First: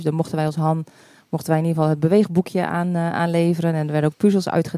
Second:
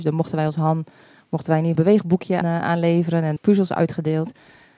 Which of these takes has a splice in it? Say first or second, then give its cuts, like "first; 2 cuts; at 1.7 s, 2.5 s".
second; 3 cuts; at 1.8 s, 2.4 s, 3.4 s